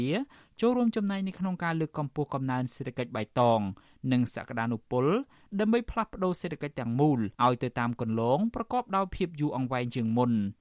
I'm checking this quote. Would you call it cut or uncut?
cut